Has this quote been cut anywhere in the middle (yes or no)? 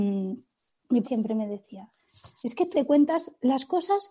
yes